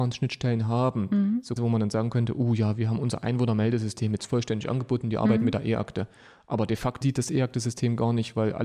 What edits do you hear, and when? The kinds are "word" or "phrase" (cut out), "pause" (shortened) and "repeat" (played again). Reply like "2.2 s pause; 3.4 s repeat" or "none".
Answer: 1.6 s word; 7.0 s word